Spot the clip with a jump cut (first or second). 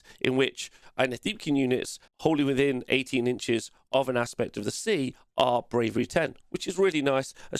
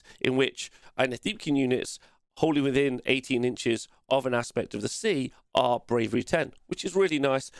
first